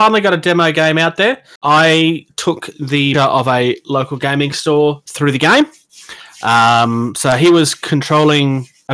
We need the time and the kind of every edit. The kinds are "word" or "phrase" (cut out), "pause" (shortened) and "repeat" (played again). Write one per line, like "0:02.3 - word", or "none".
0:03.1 - word